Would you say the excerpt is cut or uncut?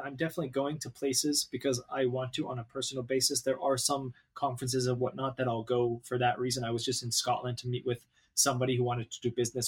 uncut